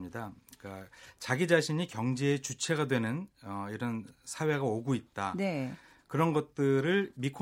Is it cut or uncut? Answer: uncut